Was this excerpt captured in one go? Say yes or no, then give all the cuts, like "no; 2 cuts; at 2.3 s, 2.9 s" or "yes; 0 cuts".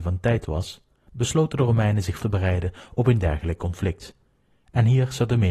no; 1 cut; at 2.2 s